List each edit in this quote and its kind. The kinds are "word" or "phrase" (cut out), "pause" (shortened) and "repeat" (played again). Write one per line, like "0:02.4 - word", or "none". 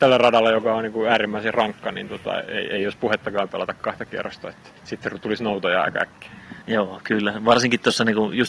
0:04.8 - pause
0:06.6 - pause